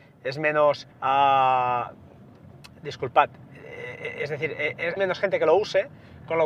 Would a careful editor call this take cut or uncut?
cut